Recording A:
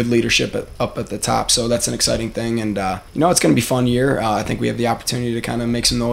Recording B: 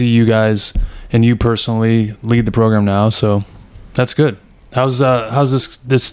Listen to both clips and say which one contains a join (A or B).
A